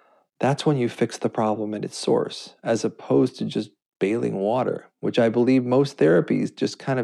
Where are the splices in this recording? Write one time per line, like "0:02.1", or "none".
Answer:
none